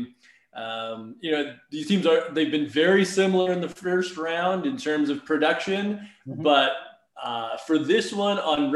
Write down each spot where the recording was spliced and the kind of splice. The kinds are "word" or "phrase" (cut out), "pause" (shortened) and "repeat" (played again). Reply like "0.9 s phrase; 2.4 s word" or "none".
none